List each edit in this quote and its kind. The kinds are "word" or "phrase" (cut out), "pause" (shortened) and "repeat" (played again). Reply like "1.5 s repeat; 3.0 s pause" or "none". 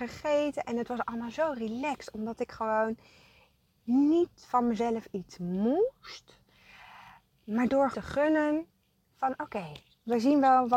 7.9 s word